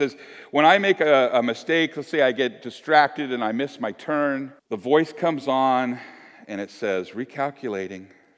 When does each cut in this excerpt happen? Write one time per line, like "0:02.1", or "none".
0:04.6